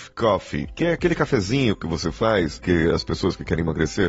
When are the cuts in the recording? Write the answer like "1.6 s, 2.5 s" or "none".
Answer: 2.6 s

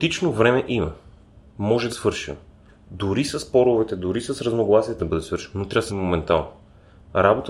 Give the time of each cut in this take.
1.9 s, 5.0 s, 5.9 s

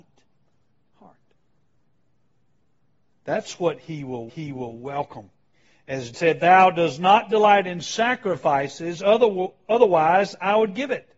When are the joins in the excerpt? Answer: 4.3 s, 6.1 s

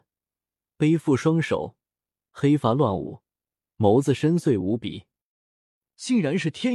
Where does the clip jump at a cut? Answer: none

